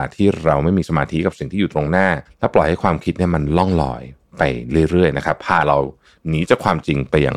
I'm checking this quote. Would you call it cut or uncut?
cut